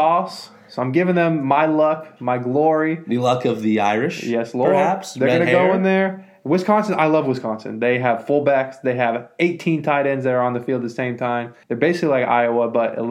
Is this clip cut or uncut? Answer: cut